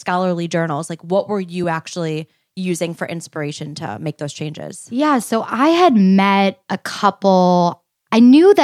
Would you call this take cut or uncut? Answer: uncut